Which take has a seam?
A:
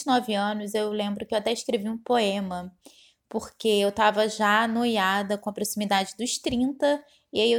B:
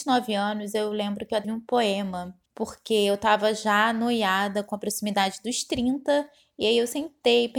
B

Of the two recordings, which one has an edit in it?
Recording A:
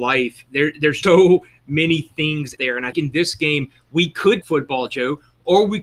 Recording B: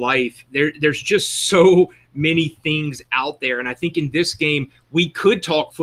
A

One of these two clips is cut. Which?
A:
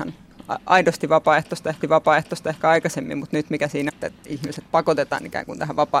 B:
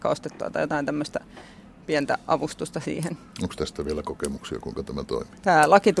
A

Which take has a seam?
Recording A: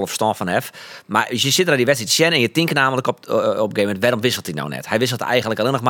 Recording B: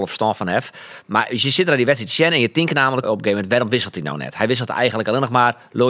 B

